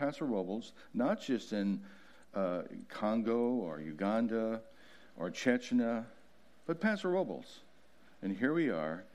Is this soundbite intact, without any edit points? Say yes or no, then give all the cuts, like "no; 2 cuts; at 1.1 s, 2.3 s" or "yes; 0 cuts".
yes; 0 cuts